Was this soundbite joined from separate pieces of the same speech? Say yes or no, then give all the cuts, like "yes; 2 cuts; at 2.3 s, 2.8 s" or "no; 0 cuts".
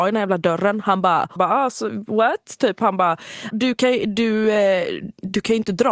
yes; 2 cuts; at 1.4 s, 3.5 s